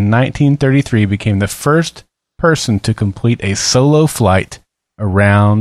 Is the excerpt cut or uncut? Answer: uncut